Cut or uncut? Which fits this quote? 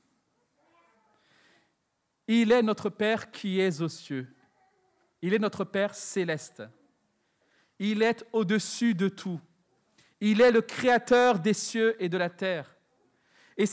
uncut